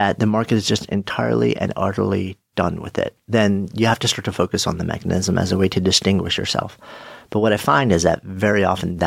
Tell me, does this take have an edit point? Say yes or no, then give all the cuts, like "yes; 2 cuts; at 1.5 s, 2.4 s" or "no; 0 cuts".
yes; 1 cut; at 3.2 s